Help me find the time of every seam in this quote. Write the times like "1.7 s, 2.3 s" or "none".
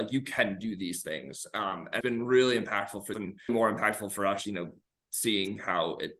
2.0 s, 3.1 s, 3.5 s, 4.4 s